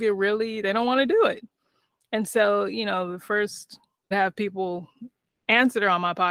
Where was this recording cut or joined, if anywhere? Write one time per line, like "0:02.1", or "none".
0:04.1

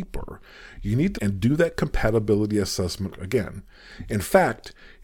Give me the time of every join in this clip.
0:01.1
0:03.1

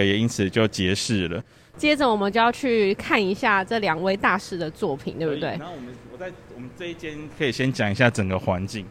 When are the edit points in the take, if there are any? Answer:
none

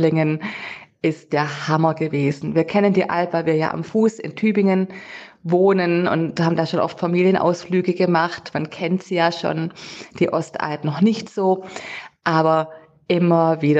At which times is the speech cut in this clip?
none

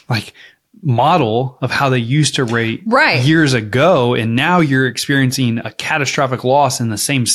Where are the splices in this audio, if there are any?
none

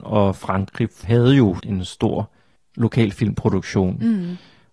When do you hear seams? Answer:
0:01.0
0:01.6
0:02.6

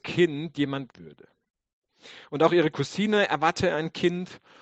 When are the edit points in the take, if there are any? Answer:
0:00.9

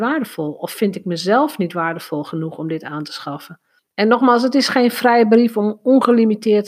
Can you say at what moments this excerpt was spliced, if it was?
0:03.8

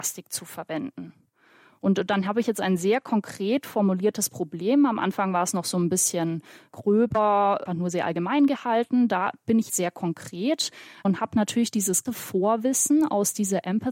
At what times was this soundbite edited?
0:07.7
0:09.7
0:12.1

